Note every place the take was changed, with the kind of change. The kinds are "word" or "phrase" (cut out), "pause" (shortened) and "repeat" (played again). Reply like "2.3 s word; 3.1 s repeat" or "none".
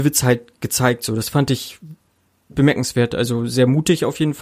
none